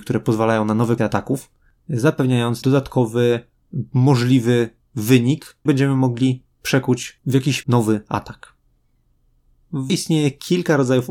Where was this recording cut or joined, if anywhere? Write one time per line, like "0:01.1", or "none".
0:01.0
0:02.6
0:05.7
0:07.6
0:09.9